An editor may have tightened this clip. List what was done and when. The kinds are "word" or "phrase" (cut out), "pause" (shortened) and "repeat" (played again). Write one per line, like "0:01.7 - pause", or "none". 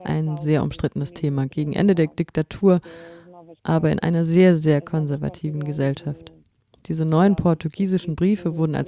none

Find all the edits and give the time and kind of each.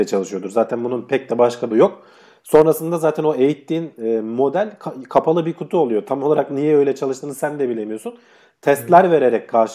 0:01.7 - word

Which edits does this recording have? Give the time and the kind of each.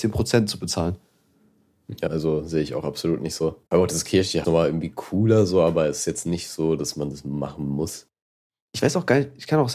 0:02.1 - word
0:03.7 - pause
0:04.4 - phrase

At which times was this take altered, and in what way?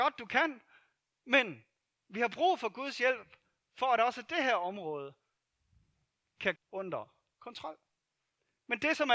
0:06.6 - word

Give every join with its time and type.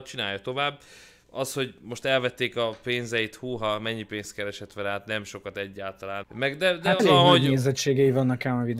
0:06.2 - word
0:07.0 - word

